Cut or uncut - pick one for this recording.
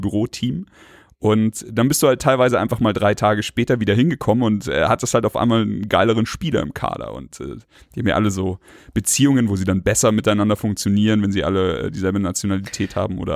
uncut